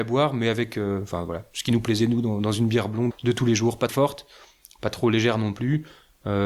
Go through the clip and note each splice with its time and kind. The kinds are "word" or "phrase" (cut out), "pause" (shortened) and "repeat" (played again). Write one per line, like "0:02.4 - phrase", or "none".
0:03.1 - word
0:03.9 - word